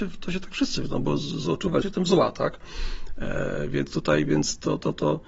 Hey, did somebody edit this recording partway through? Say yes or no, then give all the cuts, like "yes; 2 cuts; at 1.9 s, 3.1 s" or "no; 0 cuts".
yes; 1 cut; at 1.8 s